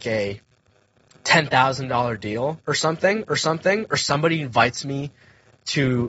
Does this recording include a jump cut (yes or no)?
yes